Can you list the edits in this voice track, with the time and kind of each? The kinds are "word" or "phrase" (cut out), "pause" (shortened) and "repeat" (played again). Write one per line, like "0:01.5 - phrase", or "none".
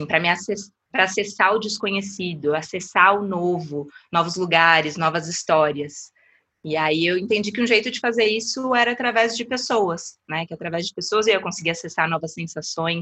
none